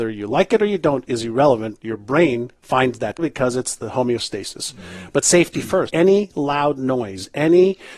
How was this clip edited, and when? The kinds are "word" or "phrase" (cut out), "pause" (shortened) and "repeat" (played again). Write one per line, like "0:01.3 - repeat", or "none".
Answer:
0:02.6 - pause
0:03.2 - word
0:05.9 - word